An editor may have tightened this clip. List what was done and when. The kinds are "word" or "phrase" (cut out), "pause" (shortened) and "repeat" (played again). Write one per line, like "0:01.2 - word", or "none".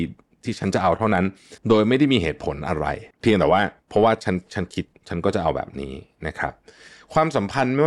0:01.6 - pause
0:03.1 - pause
0:03.8 - pause